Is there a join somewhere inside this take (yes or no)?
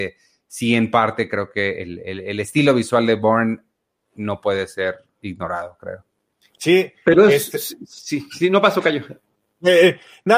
no